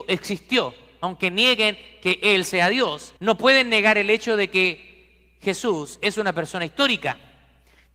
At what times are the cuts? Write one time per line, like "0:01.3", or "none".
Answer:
0:03.2